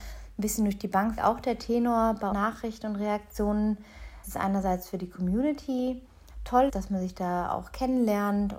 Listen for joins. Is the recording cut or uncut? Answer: cut